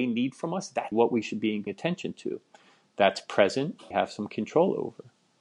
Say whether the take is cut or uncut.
cut